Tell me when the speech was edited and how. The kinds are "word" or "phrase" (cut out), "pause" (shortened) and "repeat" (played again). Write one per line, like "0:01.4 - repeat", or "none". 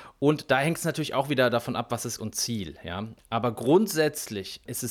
0:02.2 - word